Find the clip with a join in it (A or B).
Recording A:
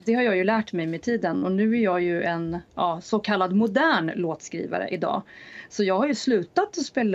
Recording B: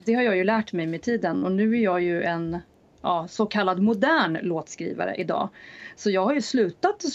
A